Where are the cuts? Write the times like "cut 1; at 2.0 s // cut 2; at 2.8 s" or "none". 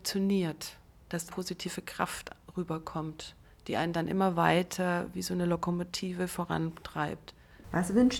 cut 1; at 1.3 s